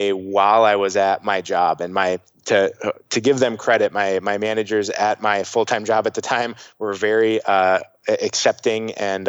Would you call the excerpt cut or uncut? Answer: uncut